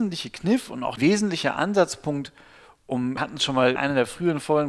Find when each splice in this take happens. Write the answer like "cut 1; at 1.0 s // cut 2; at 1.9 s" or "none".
cut 1; at 1.0 s // cut 2; at 3.2 s // cut 3; at 3.8 s